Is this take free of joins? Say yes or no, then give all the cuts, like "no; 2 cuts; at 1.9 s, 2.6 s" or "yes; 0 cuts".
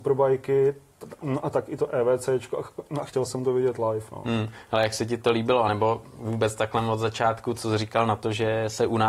yes; 0 cuts